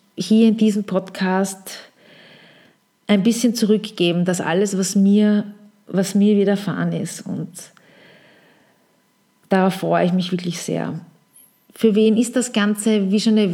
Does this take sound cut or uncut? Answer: uncut